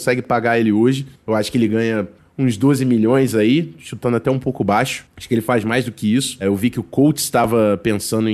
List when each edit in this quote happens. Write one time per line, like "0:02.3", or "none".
none